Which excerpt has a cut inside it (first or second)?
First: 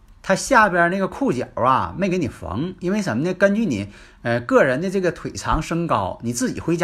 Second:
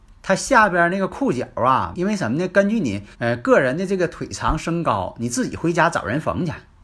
second